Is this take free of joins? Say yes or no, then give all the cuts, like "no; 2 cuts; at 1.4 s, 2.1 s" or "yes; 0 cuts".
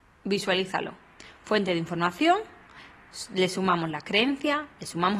yes; 0 cuts